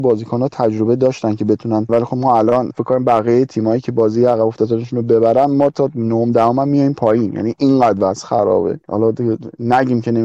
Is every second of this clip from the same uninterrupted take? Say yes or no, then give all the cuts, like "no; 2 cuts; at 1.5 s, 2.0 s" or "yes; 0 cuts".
no; 1 cut; at 1.9 s